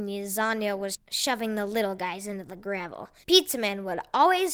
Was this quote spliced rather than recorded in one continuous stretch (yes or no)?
yes